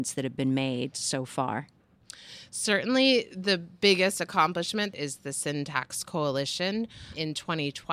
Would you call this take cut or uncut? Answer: uncut